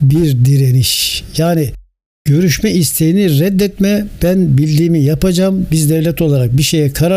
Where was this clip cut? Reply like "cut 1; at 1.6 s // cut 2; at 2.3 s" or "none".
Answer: none